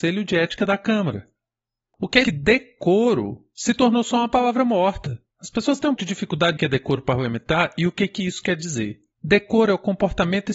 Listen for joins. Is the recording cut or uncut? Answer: cut